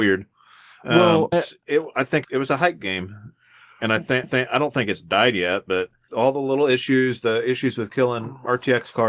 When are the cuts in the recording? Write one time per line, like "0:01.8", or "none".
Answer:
0:01.3
0:02.2
0:04.2
0:06.1